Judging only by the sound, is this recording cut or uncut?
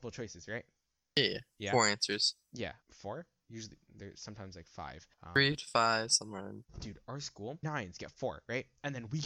cut